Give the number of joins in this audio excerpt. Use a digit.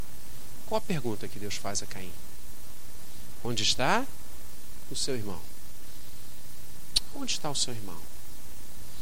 0